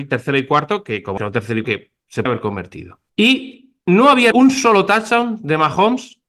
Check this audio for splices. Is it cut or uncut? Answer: cut